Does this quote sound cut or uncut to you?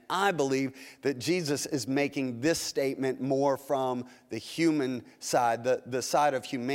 uncut